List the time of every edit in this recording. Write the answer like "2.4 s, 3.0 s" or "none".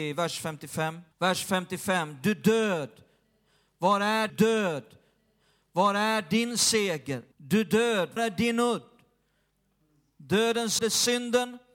1.1 s, 4.3 s, 7.3 s, 8.2 s, 10.8 s